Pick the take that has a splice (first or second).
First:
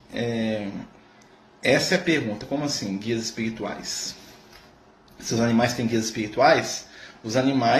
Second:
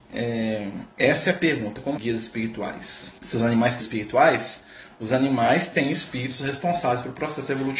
second